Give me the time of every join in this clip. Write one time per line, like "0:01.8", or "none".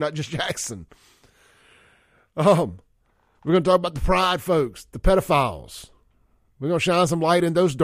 none